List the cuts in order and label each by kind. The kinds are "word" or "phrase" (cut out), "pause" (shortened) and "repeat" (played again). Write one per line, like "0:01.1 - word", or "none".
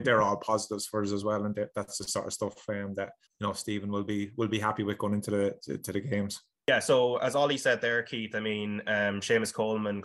0:03.2 - pause

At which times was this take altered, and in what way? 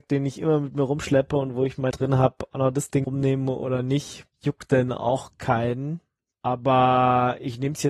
0:01.9 - word
0:03.0 - word
0:04.3 - pause
0:06.3 - pause

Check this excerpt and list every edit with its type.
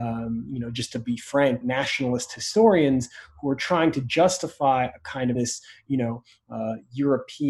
0:01.6 - word
0:05.4 - phrase

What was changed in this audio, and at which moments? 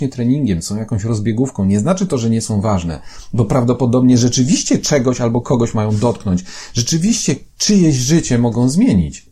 none

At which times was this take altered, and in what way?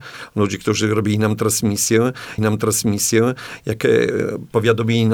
0:02.4 - repeat

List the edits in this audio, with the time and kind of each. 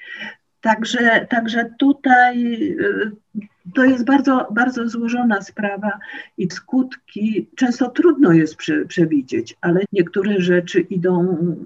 0:06.5 - word
0:09.9 - word

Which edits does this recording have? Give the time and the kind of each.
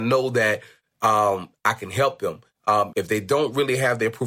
0:02.9 - word

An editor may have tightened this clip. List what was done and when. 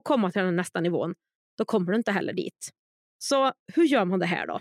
none

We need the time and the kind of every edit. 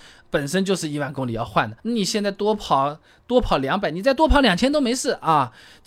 0:01.8 - pause

